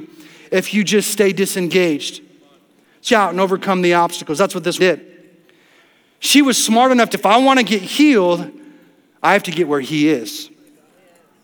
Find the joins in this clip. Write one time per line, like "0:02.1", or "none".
0:03.1
0:04.8
0:07.1